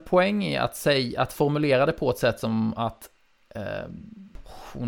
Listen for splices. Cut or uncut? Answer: uncut